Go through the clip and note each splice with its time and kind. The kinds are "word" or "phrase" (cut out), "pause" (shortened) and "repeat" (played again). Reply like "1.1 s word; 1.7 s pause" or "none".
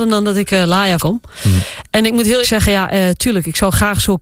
1.0 s word; 2.4 s word